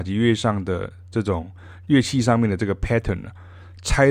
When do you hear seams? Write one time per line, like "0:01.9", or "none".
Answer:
none

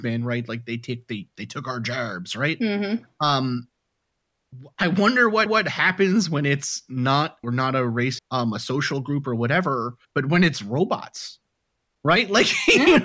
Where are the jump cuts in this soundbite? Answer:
0:05.5
0:07.4
0:08.2
0:10.0

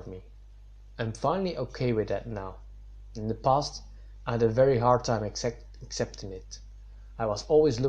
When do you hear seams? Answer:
none

